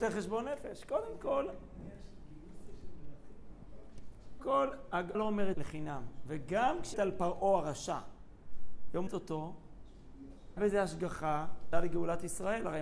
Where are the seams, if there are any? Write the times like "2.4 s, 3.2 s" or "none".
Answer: 4.4 s, 5.1 s, 5.5 s, 6.9 s, 9.1 s, 10.6 s, 11.7 s